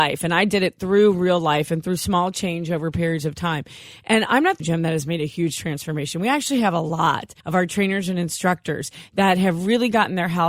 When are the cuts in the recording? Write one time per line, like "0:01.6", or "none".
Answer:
0:04.6
0:07.4